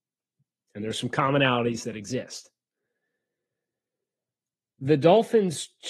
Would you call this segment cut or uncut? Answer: uncut